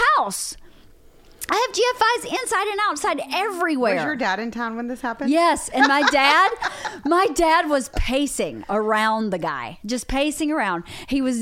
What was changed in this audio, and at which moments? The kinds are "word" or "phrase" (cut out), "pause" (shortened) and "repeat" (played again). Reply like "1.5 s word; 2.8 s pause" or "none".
none